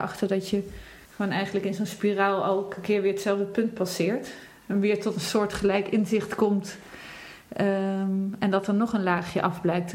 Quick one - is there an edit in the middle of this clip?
yes; 1 cut; at 1.0 s

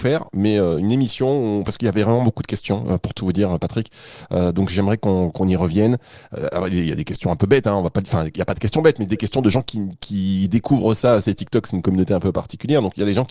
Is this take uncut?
yes; 0 cuts

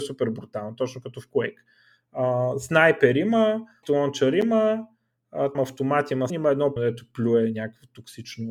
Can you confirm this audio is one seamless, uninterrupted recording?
no; 4 cuts; at 3.8 s, 5.5 s, 6.3 s, 6.8 s

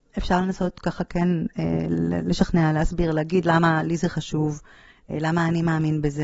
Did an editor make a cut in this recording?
no; 0 cuts

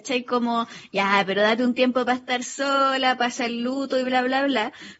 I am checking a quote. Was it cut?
no; 0 cuts

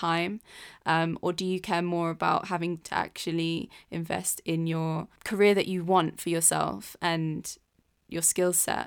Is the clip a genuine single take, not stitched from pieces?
no; 2 cuts; at 2.8 s, 5.2 s

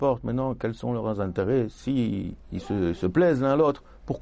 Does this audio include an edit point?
no; 0 cuts

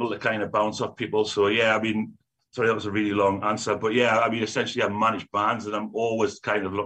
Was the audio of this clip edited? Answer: no; 0 cuts

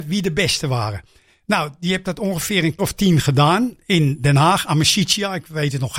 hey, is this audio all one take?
no; 1 cut; at 2.8 s

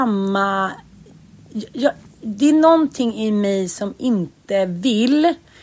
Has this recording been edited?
no; 0 cuts

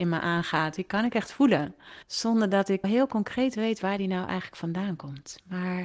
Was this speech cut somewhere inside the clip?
yes; 2 cuts; at 2.0 s, 2.8 s

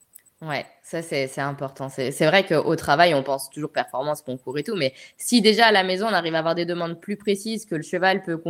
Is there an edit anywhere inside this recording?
no; 0 cuts

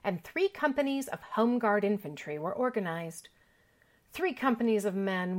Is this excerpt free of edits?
yes; 0 cuts

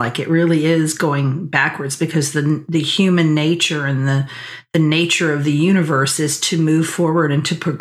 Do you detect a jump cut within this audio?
no; 0 cuts

